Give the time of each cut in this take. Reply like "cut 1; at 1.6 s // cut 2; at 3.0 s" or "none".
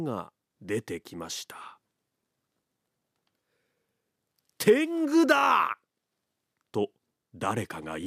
none